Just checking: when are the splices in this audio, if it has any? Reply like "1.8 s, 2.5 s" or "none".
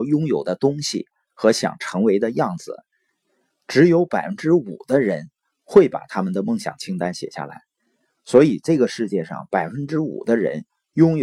none